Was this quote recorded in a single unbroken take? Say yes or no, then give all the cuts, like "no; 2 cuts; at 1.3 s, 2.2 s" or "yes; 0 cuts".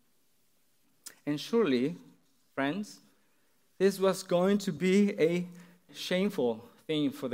no; 1 cut; at 5.9 s